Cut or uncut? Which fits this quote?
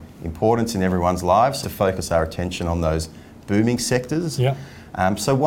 cut